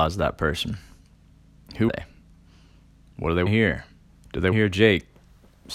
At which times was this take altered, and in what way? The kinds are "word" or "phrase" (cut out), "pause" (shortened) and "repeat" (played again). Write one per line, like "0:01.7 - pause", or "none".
0:01.9 - word
0:03.5 - word
0:04.1 - pause
0:04.5 - phrase